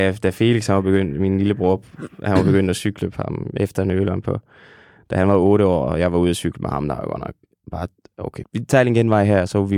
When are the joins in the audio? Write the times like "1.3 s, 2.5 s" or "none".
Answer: 8.4 s